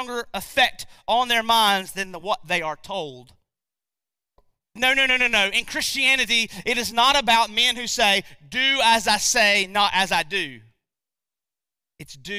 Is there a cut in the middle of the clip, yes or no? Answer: no